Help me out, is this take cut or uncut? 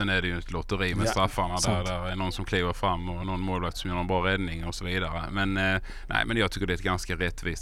uncut